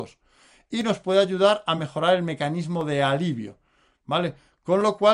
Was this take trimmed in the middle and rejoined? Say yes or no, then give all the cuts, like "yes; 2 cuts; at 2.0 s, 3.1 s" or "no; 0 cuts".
no; 0 cuts